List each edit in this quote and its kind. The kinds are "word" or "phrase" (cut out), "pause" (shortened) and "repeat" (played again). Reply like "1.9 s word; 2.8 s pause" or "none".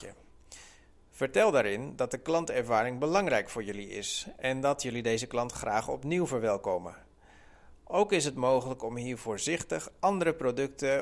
none